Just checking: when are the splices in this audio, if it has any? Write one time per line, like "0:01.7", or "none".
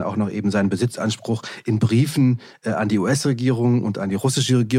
none